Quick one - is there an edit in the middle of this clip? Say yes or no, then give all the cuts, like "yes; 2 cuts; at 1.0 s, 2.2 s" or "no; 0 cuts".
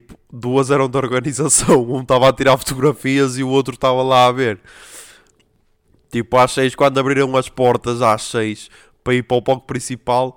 no; 0 cuts